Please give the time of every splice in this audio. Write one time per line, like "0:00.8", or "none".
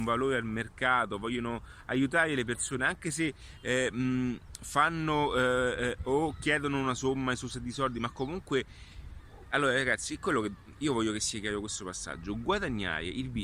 none